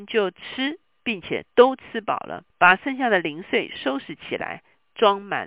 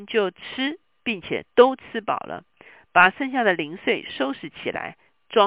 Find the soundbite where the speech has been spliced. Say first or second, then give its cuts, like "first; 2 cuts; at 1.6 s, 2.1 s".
first; 1 cut; at 2.5 s